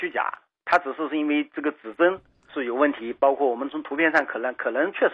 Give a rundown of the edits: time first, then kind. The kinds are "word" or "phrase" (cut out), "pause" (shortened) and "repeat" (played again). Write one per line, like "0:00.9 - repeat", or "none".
0:02.5 - word